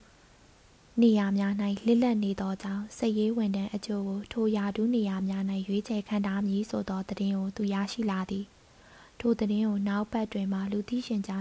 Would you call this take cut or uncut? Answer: uncut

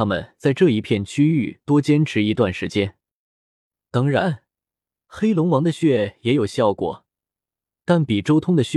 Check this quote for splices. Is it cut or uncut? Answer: uncut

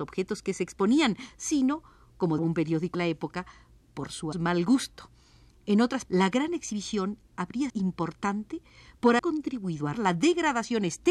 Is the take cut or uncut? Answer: cut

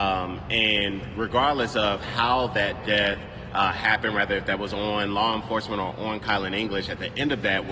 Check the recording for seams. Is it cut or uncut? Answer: uncut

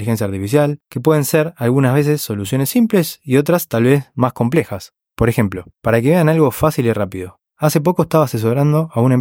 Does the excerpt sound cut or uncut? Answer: cut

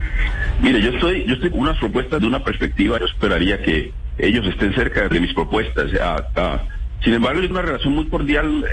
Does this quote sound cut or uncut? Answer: cut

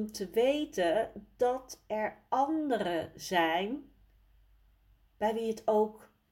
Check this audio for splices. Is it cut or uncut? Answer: uncut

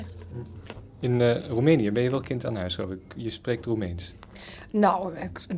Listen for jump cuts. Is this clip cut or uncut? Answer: uncut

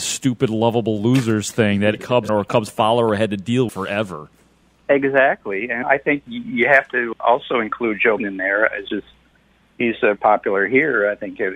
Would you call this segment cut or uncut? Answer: cut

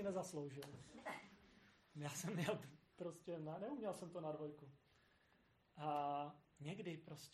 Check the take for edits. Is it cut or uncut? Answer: uncut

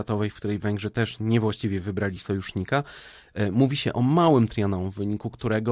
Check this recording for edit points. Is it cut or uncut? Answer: uncut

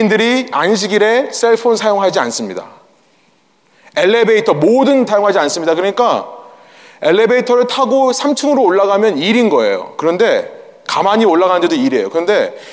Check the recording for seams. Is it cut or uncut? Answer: cut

